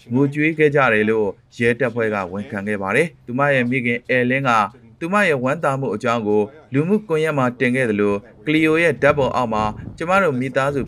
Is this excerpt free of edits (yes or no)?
yes